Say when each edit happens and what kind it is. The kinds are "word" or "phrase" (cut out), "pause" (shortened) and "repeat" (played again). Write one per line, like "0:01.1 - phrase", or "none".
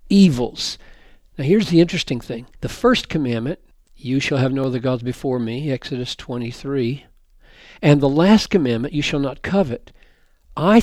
0:02.5 - pause
0:03.7 - pause